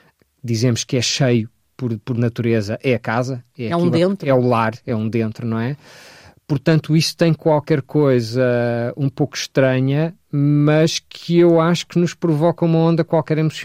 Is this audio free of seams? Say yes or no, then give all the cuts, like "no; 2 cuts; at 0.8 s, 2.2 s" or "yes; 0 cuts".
yes; 0 cuts